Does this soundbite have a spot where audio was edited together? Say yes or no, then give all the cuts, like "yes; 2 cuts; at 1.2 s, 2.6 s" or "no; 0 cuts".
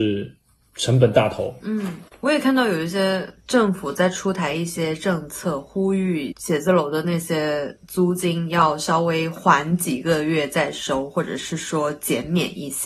yes; 2 cuts; at 2.1 s, 3.4 s